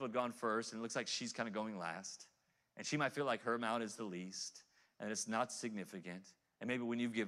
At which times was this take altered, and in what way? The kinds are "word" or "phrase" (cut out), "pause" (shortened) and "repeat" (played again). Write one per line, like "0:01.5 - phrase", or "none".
none